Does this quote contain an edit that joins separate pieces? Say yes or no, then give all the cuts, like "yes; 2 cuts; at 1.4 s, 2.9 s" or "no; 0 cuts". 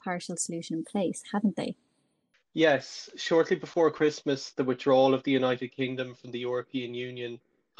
no; 0 cuts